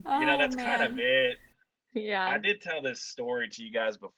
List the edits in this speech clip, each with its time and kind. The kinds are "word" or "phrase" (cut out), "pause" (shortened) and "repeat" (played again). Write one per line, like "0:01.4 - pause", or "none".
none